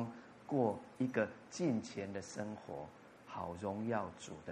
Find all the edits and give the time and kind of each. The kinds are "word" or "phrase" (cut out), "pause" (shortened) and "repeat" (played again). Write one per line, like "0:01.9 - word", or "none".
none